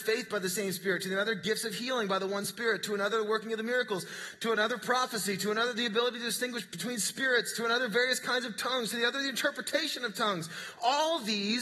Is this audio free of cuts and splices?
yes; 0 cuts

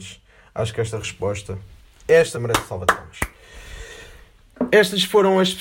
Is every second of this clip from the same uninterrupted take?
no; 1 cut; at 2.3 s

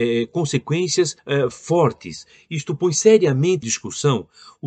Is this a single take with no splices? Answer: no; 2 cuts; at 1.2 s, 3.6 s

